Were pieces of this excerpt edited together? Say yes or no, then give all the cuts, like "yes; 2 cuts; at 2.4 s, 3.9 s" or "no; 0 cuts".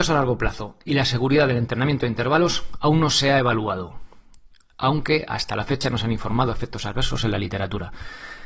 no; 0 cuts